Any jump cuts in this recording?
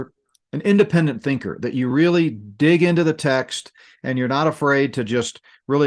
no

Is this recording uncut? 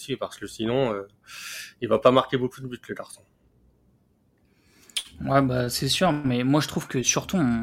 yes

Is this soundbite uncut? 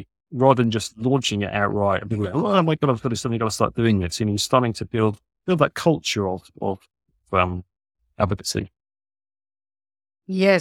yes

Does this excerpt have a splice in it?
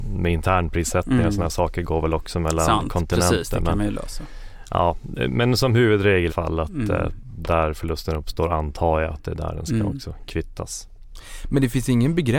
yes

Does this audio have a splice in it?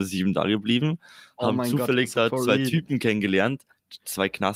no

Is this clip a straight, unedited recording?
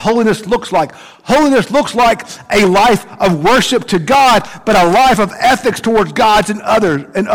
yes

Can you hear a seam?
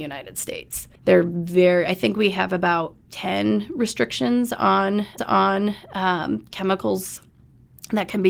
yes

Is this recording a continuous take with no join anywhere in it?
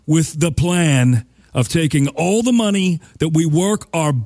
yes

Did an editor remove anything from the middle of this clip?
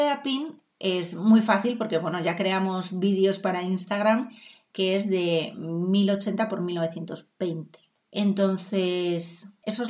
no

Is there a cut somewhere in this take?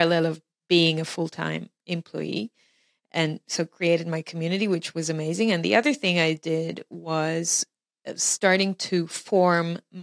no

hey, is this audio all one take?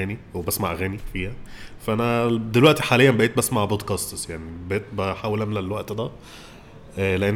yes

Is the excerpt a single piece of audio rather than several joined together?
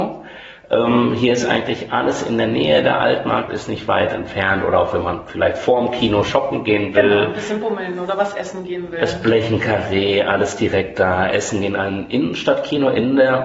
yes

